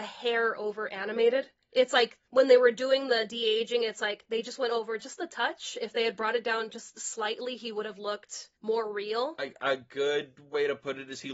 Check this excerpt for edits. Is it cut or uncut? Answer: cut